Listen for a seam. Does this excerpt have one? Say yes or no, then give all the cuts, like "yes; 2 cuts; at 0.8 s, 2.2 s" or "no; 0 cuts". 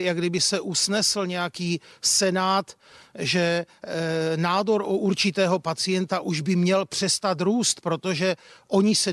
no; 0 cuts